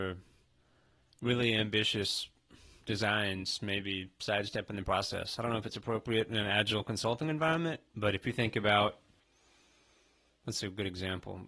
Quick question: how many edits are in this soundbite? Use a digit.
0